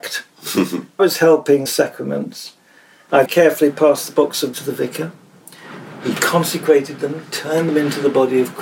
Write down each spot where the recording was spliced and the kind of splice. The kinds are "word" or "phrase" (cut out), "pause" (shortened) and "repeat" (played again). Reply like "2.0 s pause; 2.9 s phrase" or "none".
1.0 s phrase; 1.7 s phrase; 3.3 s word; 4.5 s word